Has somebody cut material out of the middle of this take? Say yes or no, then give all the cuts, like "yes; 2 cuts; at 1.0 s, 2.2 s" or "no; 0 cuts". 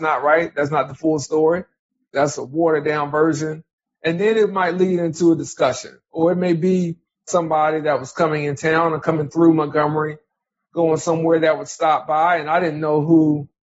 no; 0 cuts